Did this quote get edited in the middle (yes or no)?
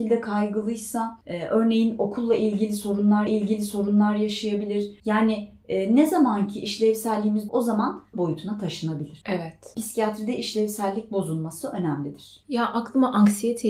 yes